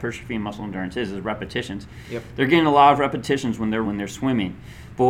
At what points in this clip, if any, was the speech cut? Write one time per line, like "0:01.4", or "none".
0:03.8